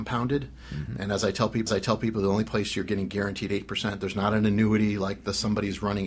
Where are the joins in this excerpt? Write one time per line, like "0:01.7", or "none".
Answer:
0:01.7